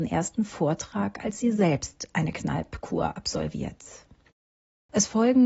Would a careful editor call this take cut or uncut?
uncut